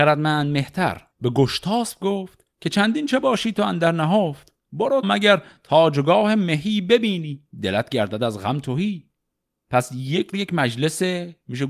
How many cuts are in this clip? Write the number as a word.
five